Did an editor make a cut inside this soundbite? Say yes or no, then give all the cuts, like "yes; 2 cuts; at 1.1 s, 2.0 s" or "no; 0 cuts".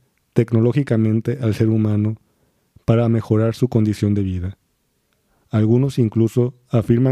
no; 0 cuts